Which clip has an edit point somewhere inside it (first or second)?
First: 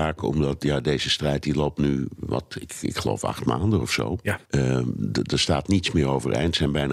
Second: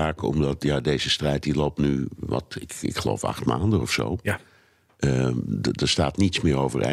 first